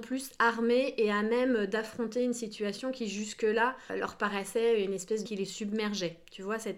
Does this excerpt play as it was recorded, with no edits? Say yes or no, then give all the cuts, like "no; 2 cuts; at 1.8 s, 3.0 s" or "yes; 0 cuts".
no; 2 cuts; at 3.9 s, 5.3 s